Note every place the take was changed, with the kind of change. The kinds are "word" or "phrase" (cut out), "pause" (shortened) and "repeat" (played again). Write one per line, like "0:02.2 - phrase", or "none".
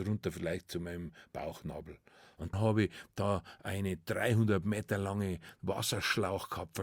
0:02.5 - word